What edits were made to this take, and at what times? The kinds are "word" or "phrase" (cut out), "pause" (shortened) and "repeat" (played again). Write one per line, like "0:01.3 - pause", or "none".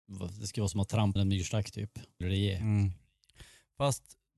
0:01.2 - word
0:02.2 - word